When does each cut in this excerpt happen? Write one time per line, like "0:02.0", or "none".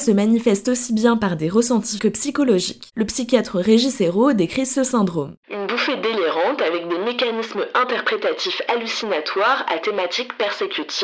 0:02.0

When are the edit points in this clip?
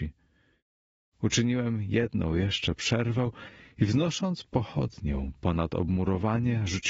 none

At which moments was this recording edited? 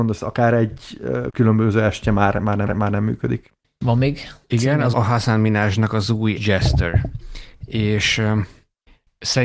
0:01.3
0:02.7
0:04.9
0:06.4

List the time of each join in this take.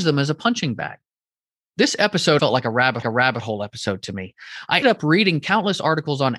0:02.4
0:03.0
0:04.8

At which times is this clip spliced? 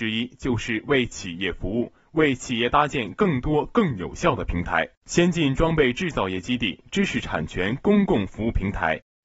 0:05.0

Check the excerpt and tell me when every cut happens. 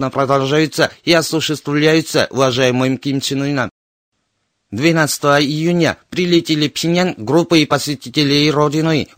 none

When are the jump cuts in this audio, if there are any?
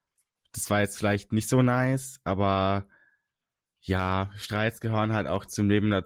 none

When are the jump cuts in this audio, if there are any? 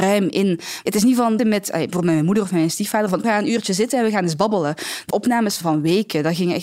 0:01.4
0:03.2
0:05.1

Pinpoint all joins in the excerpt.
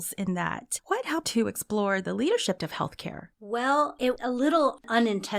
0:01.2
0:02.6
0:03.3
0:04.2

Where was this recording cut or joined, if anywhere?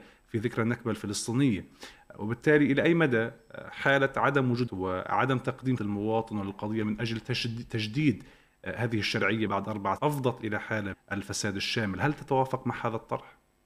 0:04.7
0:05.8
0:06.8
0:09.5
0:10.0
0:10.9

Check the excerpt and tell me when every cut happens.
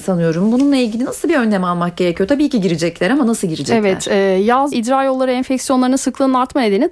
0:04.7

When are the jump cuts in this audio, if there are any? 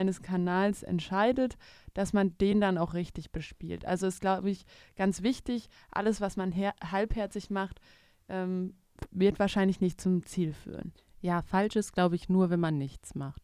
none

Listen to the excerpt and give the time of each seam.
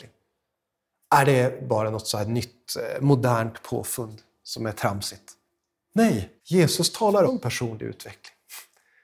0:06.4
0:07.3

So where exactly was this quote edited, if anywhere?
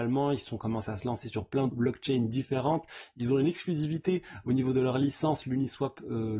0:01.7

